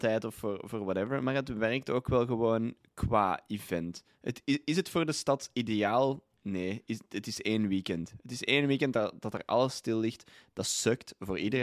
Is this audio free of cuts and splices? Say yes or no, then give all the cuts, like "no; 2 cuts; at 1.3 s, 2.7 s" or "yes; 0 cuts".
yes; 0 cuts